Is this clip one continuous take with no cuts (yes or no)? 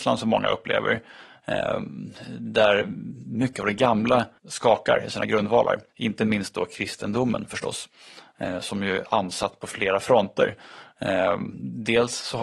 no